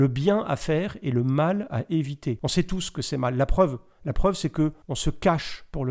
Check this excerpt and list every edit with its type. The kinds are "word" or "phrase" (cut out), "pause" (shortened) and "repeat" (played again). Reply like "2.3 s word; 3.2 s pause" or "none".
4.8 s pause